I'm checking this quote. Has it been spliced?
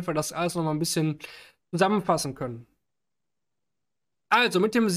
no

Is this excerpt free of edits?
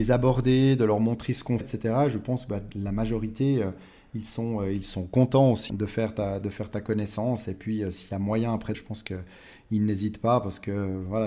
no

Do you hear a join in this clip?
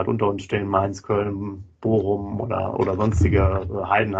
no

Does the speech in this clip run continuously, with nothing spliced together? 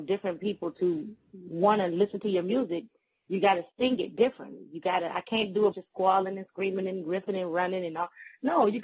no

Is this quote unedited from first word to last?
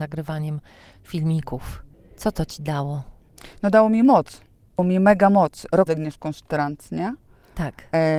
no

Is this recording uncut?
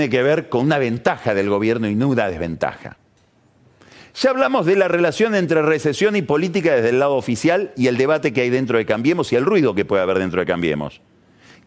yes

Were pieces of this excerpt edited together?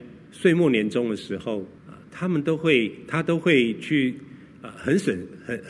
yes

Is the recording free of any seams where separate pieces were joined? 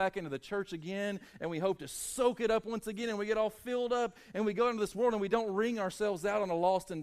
yes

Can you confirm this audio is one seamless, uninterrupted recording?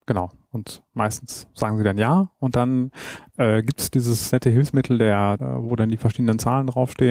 no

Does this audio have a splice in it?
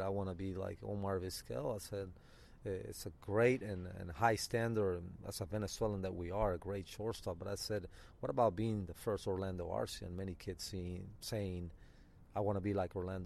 no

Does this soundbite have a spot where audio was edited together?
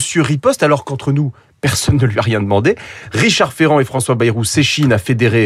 no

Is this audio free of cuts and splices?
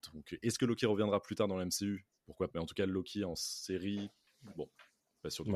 no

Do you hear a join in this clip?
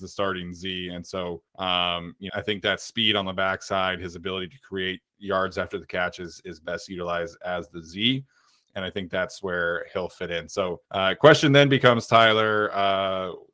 yes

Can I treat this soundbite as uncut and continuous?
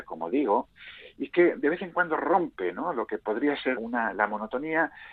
no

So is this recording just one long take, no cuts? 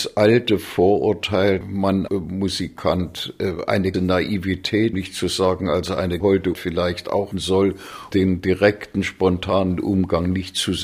no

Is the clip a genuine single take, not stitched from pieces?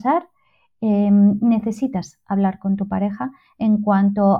yes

